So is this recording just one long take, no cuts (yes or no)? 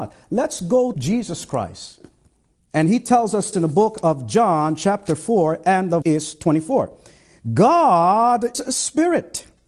no